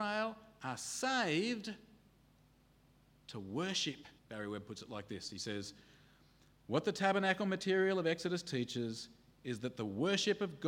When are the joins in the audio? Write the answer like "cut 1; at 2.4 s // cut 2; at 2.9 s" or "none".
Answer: cut 1; at 4.2 s